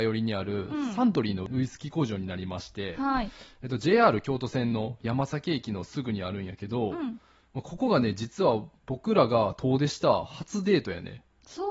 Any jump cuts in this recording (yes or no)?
no